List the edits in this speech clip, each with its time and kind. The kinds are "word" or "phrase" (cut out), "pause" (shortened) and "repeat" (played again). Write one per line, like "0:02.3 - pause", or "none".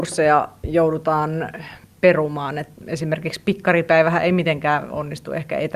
none